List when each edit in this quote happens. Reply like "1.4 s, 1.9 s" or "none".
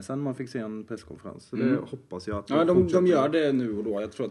none